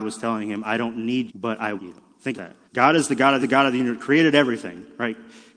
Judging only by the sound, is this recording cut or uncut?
cut